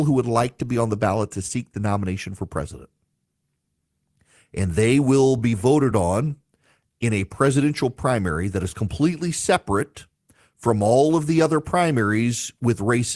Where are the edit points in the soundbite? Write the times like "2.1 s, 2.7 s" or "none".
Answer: none